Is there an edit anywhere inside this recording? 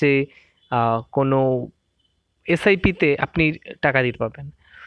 no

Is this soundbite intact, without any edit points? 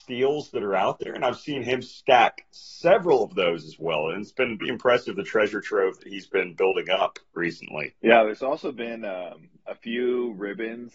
no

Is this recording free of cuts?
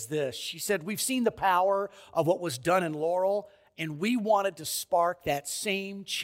yes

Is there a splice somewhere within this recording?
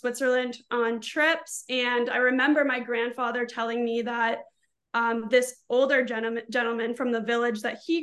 no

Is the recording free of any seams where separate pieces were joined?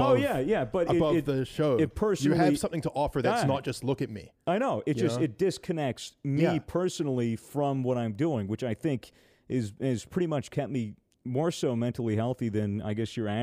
yes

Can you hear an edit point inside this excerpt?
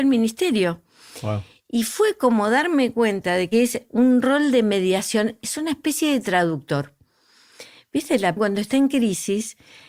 yes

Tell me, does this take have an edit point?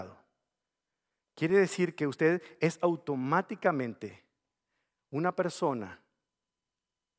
no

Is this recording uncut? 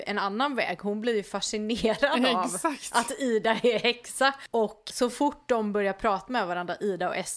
yes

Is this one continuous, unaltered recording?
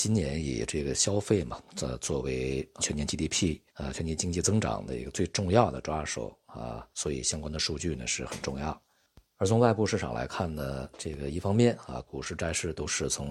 no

